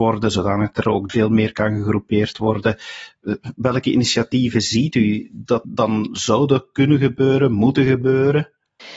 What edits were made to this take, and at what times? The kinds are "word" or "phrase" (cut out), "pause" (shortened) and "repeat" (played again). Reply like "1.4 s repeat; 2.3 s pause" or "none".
1.1 s word; 5.6 s word